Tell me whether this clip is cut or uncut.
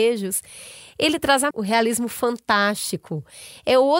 cut